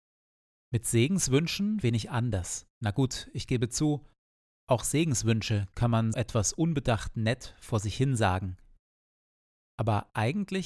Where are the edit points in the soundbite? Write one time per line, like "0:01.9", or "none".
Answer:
0:01.8
0:02.7
0:06.1